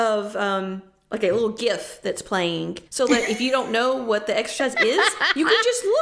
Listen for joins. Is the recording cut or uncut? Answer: cut